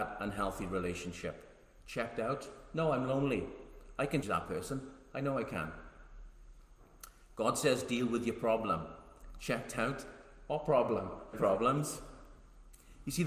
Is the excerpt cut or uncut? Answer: cut